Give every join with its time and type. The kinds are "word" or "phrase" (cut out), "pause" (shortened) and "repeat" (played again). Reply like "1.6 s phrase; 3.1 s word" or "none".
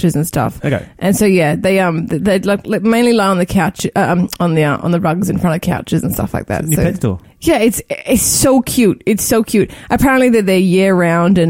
7.2 s pause